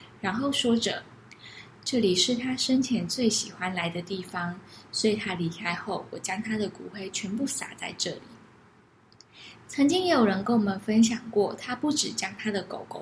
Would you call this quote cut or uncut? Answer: uncut